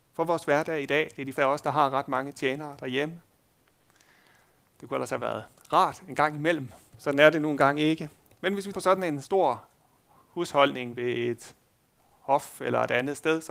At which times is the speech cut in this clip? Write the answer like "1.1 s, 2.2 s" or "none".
1.3 s, 6.9 s, 8.7 s